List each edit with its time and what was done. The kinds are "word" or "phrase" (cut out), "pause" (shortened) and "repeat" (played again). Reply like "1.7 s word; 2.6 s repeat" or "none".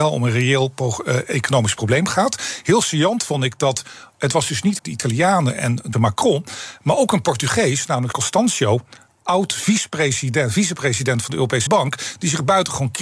4.8 s word; 5.9 s word; 8.1 s word; 11.7 s word